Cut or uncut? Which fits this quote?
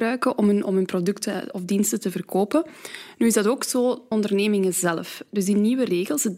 cut